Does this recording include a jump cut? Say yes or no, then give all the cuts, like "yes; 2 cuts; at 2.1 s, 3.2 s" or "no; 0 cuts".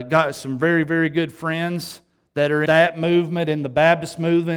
yes; 1 cut; at 2.7 s